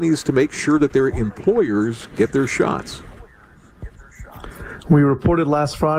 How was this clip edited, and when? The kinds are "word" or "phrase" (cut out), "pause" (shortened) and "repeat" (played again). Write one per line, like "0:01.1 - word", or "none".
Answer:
none